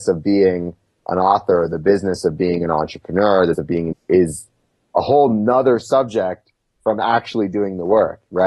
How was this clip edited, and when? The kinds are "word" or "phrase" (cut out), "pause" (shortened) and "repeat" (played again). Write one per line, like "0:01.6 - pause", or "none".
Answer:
0:03.5 - word
0:03.9 - word